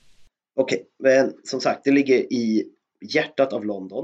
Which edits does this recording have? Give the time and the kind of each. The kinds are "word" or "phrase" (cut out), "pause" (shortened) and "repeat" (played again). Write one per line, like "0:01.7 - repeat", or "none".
none